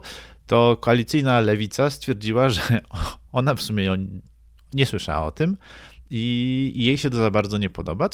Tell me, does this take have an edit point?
no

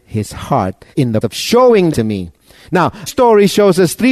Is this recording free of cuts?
no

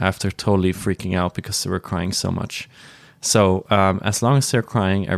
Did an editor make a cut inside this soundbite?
no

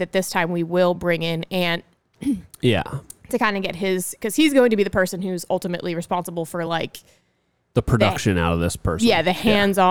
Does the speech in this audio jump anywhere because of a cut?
no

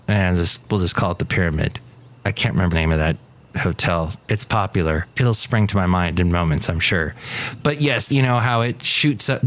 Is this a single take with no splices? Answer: no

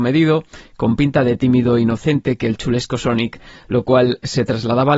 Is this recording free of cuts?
yes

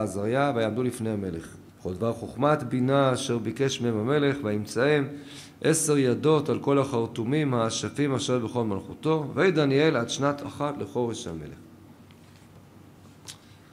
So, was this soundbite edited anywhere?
yes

